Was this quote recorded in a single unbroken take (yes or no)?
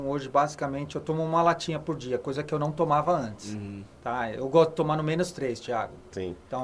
yes